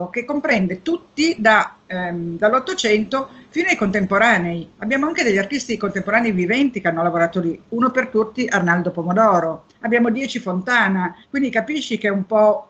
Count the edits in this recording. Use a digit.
3